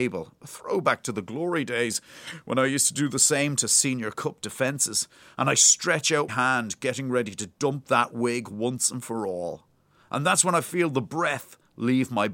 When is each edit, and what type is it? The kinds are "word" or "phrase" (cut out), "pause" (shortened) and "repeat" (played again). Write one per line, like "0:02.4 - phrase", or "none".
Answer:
0:06.3 - word